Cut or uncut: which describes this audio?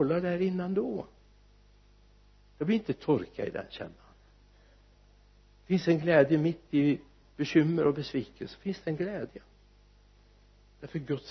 uncut